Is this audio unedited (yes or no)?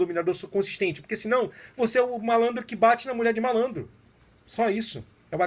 yes